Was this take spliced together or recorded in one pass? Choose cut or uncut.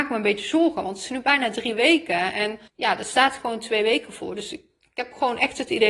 cut